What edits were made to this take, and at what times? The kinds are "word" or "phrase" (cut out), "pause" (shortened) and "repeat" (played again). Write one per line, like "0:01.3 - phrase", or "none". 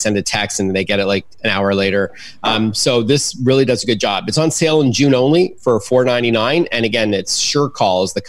none